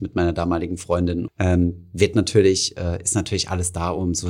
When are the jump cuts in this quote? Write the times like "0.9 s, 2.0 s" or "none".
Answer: 1.3 s